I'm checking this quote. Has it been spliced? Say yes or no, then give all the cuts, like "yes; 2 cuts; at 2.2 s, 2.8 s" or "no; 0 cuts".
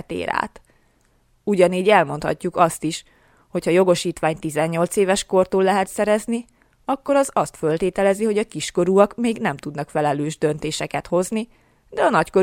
no; 0 cuts